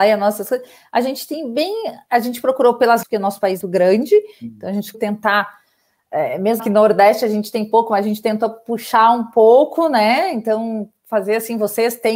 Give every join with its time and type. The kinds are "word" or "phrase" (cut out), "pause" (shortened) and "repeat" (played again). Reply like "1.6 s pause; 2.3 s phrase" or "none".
3.0 s word; 3.6 s word; 4.9 s word; 6.6 s word